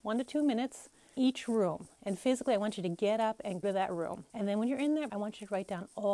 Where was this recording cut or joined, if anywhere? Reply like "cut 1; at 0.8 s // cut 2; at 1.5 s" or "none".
cut 1; at 1.2 s // cut 2; at 1.9 s // cut 3; at 3.6 s // cut 4; at 4.3 s // cut 5; at 5.1 s